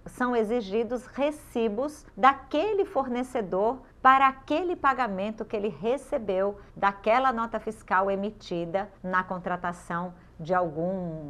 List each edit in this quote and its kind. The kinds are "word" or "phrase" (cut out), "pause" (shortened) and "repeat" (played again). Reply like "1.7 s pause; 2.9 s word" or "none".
2.1 s pause; 3.9 s pause; 6.7 s pause; 9.0 s pause